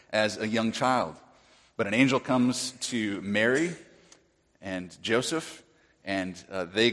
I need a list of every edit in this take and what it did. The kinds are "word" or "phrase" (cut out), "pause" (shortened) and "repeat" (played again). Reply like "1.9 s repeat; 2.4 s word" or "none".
none